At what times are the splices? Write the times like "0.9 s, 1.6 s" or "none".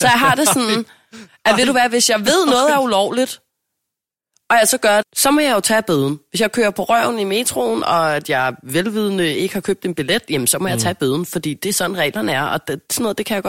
5.0 s